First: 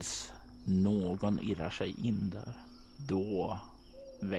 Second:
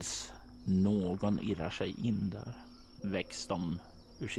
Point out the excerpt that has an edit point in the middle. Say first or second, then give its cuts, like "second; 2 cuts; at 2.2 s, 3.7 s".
second; 1 cut; at 3.0 s